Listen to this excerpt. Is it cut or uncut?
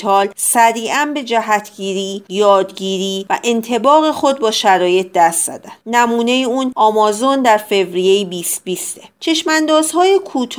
cut